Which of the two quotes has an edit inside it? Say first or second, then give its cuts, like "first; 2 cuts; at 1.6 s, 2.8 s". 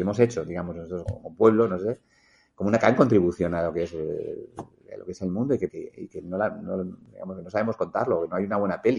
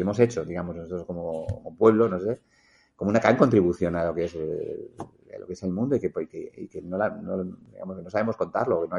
first; 2 cuts; at 1.1 s, 5.7 s